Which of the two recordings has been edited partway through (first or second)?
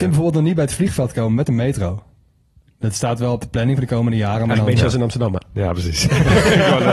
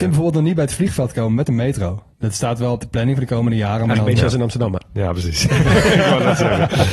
second